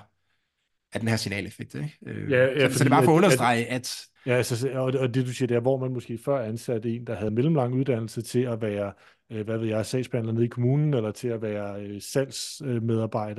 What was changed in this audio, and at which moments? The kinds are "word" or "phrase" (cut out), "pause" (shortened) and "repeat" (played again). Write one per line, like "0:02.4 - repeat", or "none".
0:04.2 - pause
0:07.3 - phrase

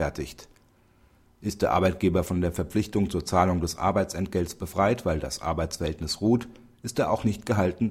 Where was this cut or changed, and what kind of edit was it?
none

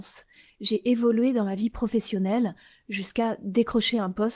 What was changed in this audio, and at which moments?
none

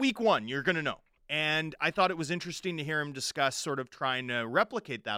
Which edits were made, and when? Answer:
0:01.2 - pause

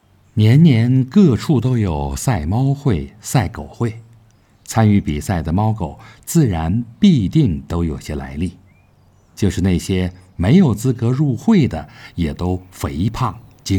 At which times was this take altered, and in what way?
none

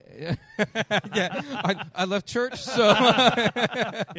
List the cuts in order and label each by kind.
0:02.2 - word

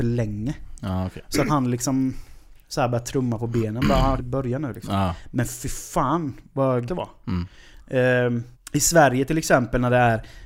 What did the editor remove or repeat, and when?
0:01.5 - word
0:02.5 - pause
0:04.2 - word
0:06.9 - word
0:08.5 - pause

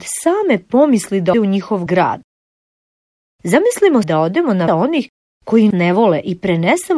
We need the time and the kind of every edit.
0:01.3 - word
0:01.9 - word
0:04.0 - word
0:04.7 - word
0:05.7 - word

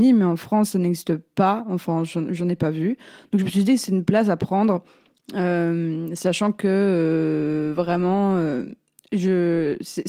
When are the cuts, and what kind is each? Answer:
none

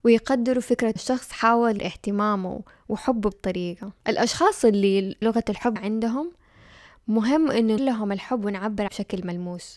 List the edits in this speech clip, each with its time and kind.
0:01.0 - word
0:01.8 - word
0:03.3 - word
0:05.2 - word
0:05.8 - word
0:07.8 - word
0:08.9 - word

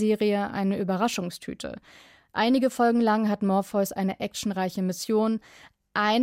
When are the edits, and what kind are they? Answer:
none

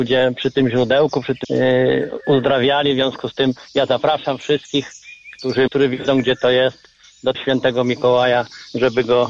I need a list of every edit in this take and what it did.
0:01.4 - word
0:05.7 - word
0:07.3 - word

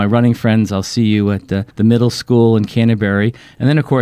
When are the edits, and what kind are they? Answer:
0:01.7 - pause

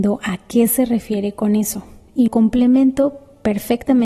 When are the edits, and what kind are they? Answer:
0:02.3 - word

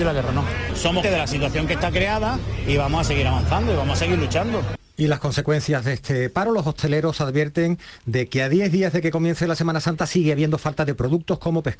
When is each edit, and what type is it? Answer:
0:01.0 - word

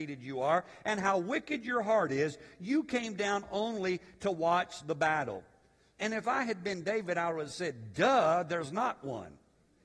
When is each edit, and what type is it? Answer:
none

